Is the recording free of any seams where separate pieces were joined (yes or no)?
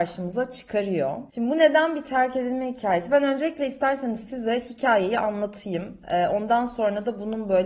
no